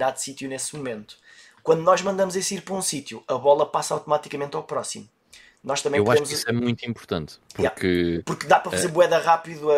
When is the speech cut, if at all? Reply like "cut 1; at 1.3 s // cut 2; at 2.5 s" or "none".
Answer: none